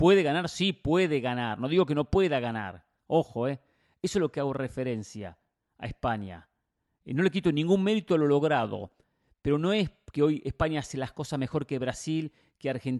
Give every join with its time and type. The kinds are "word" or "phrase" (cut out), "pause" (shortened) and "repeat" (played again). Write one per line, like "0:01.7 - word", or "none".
none